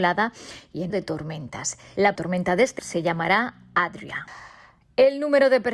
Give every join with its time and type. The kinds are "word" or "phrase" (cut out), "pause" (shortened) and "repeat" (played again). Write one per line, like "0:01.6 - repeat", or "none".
0:00.9 - word
0:02.2 - word
0:02.8 - word